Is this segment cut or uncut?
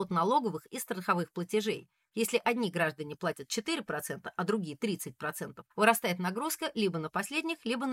cut